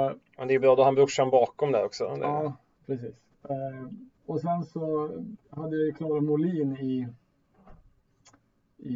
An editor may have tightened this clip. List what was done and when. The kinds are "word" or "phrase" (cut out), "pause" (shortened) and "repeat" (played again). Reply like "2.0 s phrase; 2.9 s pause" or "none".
4.1 s pause; 5.4 s pause

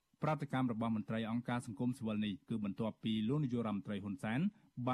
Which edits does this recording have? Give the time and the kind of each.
2.4 s pause

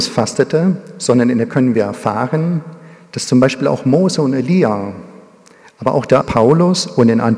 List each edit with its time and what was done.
1.5 s word; 6.2 s word

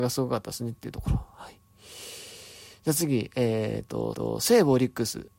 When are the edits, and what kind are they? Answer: 4.1 s repeat

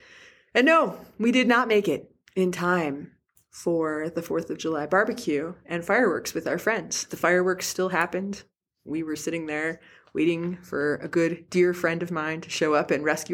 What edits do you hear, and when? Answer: none

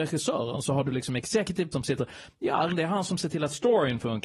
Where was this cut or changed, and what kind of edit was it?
1.7 s word; 2.7 s word

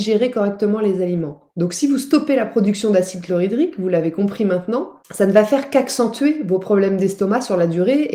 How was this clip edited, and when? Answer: 1.5 s pause; 5.0 s pause

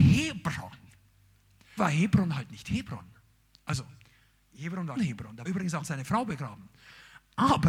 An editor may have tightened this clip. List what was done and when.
1.8 s word; 5.0 s word; 5.4 s word; 5.8 s word

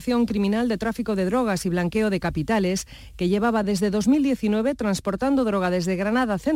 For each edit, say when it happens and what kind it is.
none

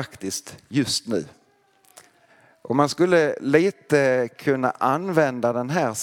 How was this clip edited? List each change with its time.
none

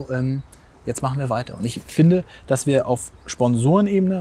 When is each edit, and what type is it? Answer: none

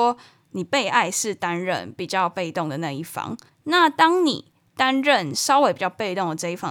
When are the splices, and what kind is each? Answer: 3.5 s pause

